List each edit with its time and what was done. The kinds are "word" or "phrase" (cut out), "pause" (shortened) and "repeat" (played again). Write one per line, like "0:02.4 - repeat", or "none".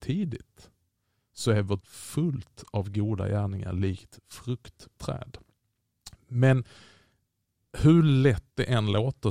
0:01.8 - word
0:05.0 - phrase